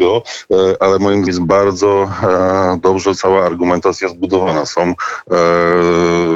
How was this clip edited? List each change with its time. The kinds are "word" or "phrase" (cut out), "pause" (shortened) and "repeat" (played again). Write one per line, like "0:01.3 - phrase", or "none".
0:01.3 - word